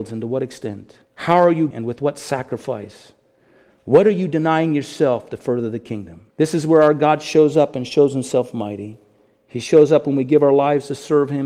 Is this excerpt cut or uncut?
cut